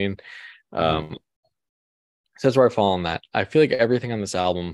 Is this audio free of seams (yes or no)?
yes